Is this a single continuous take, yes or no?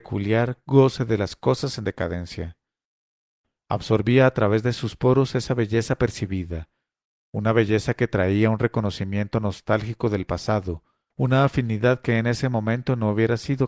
yes